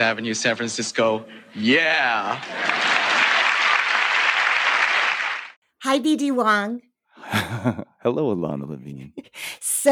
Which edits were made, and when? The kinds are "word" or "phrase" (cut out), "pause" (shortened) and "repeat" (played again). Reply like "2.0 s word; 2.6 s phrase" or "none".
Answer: none